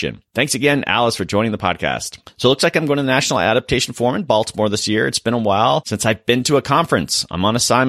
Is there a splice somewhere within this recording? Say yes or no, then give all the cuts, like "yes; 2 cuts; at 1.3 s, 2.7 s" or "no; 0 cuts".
no; 0 cuts